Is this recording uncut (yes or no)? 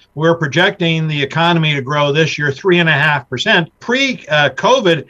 no